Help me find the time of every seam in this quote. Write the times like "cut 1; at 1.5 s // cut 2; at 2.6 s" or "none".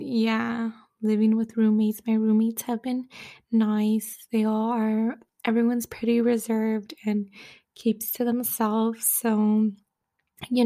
none